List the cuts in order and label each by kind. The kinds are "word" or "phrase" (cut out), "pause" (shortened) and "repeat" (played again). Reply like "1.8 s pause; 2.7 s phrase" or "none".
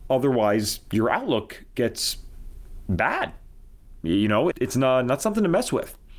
4.5 s word